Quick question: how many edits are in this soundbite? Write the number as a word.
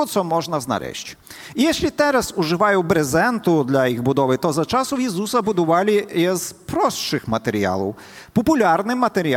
zero